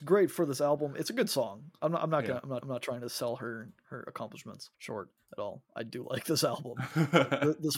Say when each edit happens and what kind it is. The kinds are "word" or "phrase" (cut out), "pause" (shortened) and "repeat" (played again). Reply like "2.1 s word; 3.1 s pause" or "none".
2.6 s repeat; 4.7 s pause